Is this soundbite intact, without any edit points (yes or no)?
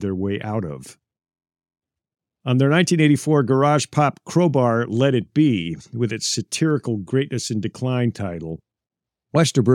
yes